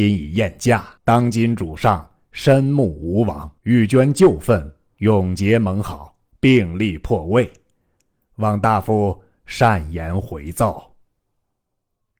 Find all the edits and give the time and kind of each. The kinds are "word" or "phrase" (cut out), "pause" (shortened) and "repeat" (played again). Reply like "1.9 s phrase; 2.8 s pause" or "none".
1.0 s pause; 3.6 s pause